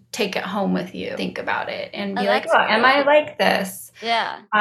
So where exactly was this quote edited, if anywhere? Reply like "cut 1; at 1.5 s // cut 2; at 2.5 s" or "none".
cut 1; at 1.2 s